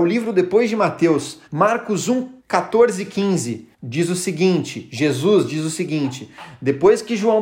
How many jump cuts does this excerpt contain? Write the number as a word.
three